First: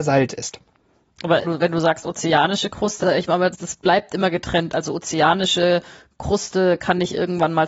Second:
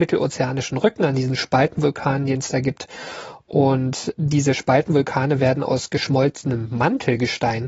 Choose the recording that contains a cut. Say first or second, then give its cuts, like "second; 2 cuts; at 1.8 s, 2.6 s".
first; 3 cuts; at 1.4 s, 3.0 s, 3.5 s